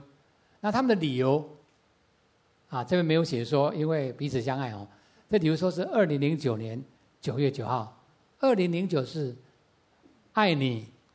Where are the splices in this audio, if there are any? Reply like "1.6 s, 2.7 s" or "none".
none